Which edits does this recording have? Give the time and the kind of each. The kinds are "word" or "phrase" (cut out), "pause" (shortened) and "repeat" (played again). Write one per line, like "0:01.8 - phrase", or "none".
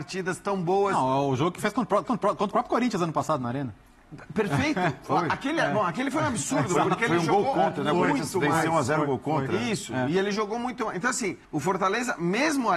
0:02.0 - repeat
0:11.4 - pause